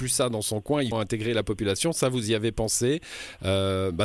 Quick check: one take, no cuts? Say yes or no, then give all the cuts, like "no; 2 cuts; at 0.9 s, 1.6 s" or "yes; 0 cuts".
no; 1 cut; at 0.9 s